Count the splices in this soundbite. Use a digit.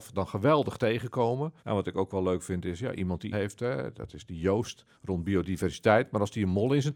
3